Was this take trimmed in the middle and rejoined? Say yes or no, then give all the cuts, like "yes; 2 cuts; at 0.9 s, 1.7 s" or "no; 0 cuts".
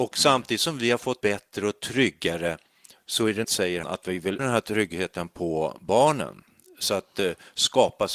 yes; 4 cuts; at 1.2 s, 3.4 s, 3.8 s, 4.4 s